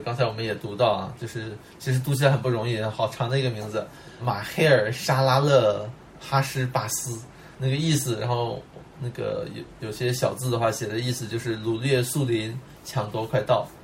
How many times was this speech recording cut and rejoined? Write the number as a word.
two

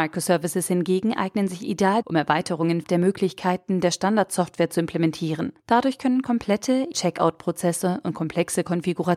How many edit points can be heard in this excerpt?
four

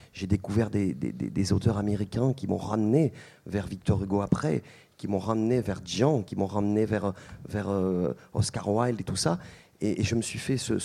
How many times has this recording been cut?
zero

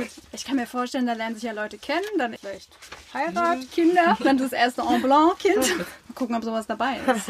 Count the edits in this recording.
one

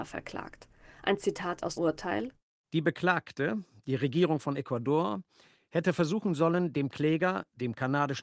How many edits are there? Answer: one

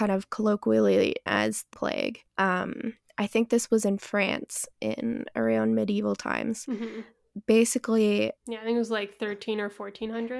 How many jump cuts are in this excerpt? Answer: four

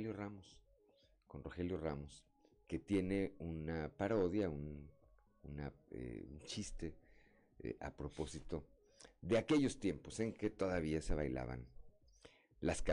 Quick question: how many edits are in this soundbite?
zero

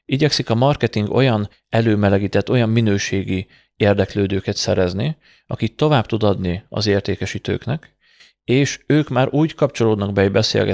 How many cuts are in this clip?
zero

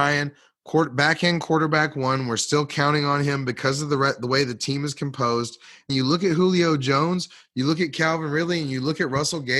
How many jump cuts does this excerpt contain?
one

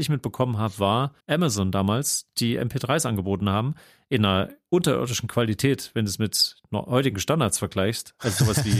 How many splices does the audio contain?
one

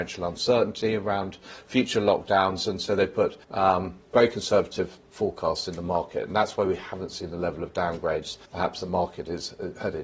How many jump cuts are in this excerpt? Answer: two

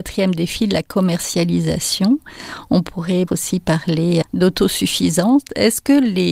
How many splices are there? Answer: two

